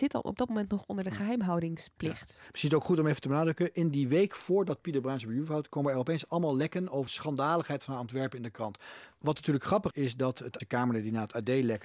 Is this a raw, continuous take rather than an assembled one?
no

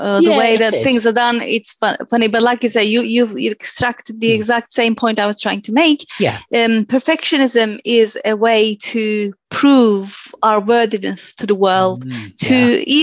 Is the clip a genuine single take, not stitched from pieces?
yes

